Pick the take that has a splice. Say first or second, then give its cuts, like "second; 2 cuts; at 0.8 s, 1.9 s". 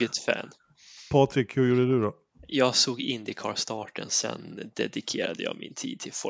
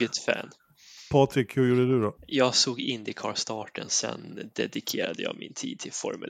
second; 1 cut; at 2.2 s